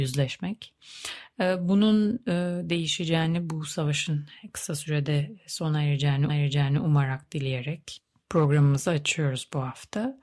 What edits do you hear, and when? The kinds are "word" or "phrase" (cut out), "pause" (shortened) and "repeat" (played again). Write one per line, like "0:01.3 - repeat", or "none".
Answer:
0:06.3 - repeat